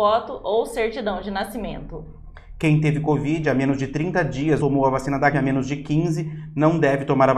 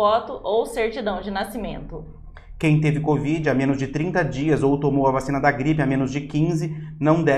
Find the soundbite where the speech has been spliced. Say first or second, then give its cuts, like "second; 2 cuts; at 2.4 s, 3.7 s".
first; 2 cuts; at 4.6 s, 5.3 s